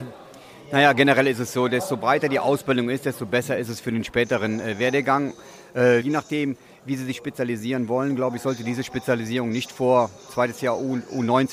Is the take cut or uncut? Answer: cut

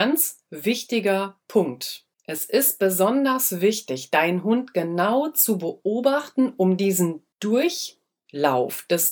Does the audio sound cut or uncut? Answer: cut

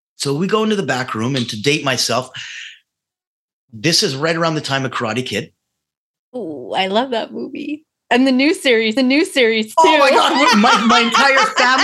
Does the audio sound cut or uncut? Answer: cut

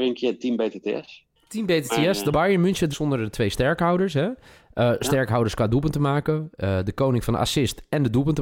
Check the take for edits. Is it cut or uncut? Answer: cut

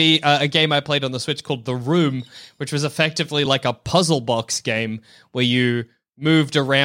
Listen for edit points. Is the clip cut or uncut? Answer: uncut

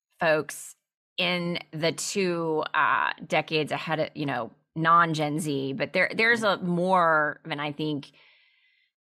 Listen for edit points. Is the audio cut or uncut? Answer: uncut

